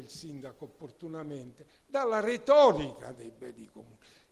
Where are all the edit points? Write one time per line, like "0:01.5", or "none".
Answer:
none